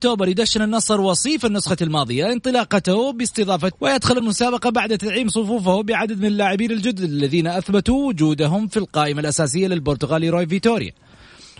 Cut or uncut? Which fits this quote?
cut